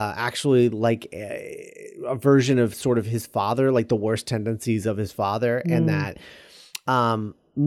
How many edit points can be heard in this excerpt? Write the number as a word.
zero